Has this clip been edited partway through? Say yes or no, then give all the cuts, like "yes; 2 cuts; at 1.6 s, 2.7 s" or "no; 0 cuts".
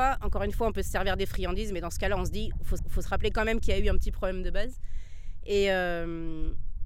yes; 1 cut; at 2.8 s